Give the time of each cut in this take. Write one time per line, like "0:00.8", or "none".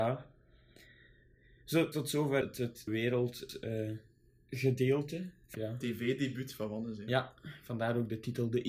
0:01.9
0:02.4
0:02.9
0:05.5